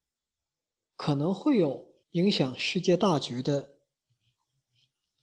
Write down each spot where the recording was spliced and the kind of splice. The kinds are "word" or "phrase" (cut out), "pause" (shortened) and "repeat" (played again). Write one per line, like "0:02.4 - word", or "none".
0:02.0 - pause